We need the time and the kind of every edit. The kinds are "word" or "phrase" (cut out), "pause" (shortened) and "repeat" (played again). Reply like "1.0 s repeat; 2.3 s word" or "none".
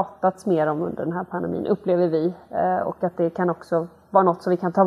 none